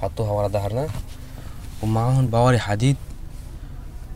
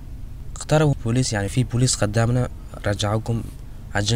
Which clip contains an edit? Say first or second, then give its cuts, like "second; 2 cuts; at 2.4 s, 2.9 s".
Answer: second; 2 cuts; at 0.9 s, 1.5 s